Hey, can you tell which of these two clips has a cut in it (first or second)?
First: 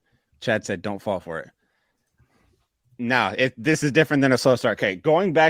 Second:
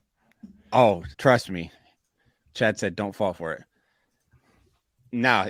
second